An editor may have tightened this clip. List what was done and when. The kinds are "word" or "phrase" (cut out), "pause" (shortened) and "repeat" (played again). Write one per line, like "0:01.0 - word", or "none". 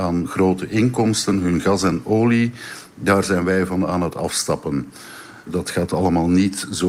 none

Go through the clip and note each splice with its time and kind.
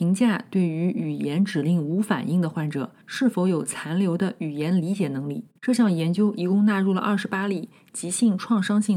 0:03.0 - pause
0:05.6 - pause

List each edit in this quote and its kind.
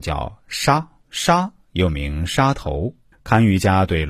0:01.0 - pause
0:03.1 - pause

